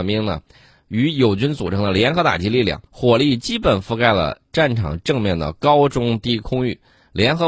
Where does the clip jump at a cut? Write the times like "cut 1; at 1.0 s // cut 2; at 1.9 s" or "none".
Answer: cut 1; at 2.9 s